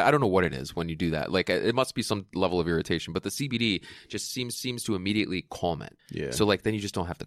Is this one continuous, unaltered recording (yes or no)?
no